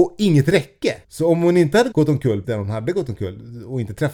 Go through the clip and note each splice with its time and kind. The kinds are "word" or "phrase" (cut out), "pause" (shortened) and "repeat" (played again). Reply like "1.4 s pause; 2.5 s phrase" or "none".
1.0 s pause; 1.9 s word; 2.4 s word